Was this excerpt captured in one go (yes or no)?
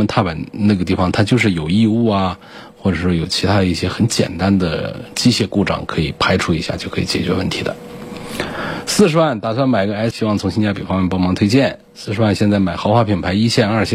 no